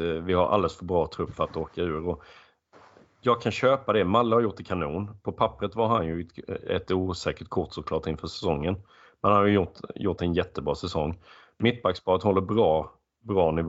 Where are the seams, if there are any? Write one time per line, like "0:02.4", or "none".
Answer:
none